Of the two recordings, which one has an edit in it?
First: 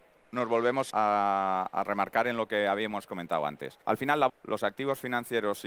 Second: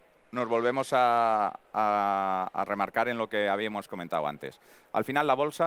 first; 3 cuts; at 0.9 s, 3.8 s, 4.3 s

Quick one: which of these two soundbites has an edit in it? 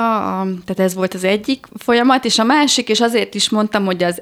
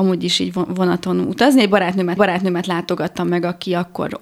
second; 1 cut; at 2.2 s

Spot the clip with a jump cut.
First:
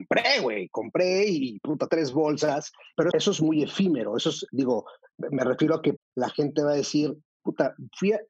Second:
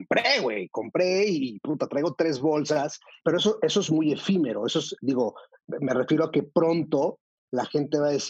first; 3 cuts; at 1.9 s, 3.1 s, 6.0 s

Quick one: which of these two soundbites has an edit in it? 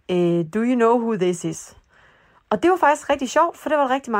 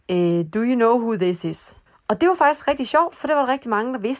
second; 1 cut; at 1.9 s

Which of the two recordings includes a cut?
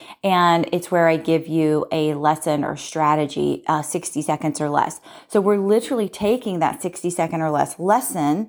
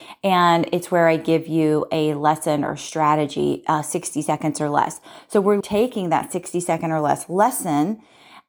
second; 1 cut; at 5.6 s

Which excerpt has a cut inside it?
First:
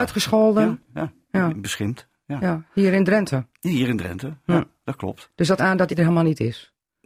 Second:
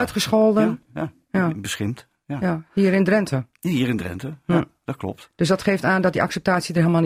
first; 2 cuts; at 5.6 s, 5.9 s

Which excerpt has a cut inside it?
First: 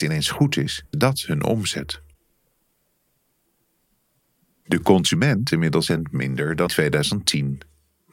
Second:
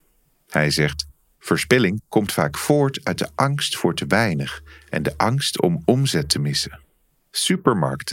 first; 4 cuts; at 0.9 s, 5.5 s, 5.9 s, 6.7 s

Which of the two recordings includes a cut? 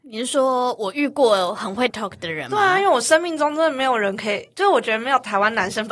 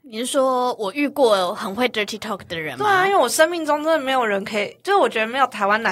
first; 1 cut; at 1.9 s

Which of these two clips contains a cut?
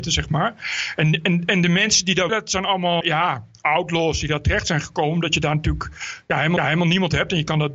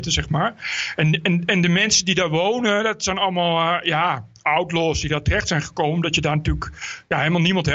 first; 3 cuts; at 2.3 s, 3.0 s, 6.6 s

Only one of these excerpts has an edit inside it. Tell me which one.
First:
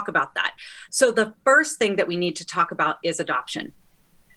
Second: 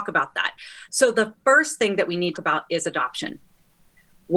second; 1 cut; at 2.3 s

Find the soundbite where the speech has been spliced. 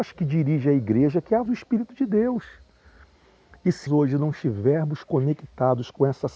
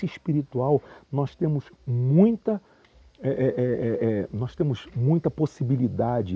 first; 2 cuts; at 1.5 s, 3.9 s

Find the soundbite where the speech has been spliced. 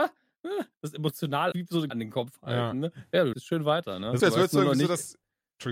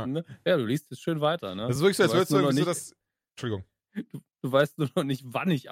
first; 4 cuts; at 1.5 s, 1.9 s, 3.3 s, 4.2 s

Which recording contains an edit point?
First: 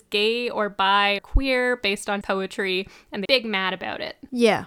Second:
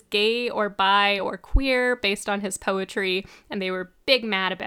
first; 3 cuts; at 1.2 s, 2.2 s, 3.3 s

